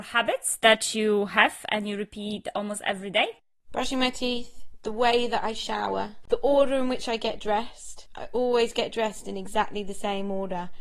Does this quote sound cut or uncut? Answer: uncut